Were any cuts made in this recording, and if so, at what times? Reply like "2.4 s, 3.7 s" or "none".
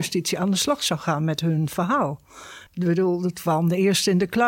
2.7 s